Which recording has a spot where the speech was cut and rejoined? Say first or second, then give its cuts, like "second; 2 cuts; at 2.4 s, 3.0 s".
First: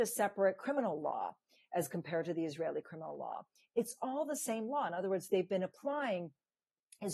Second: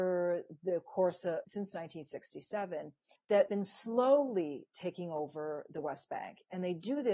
second; 3 cuts; at 1.4 s, 3.2 s, 3.5 s